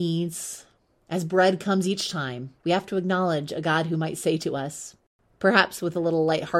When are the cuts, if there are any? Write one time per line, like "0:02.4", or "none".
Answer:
0:02.6

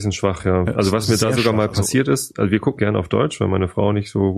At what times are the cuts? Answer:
0:02.8

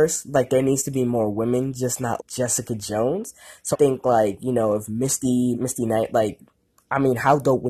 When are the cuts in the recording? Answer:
0:02.2
0:03.7
0:05.5

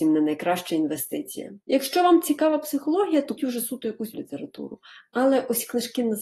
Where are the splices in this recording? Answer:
0:01.6
0:03.4
0:04.1

